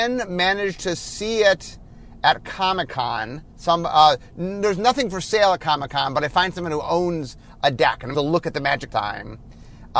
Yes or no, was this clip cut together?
yes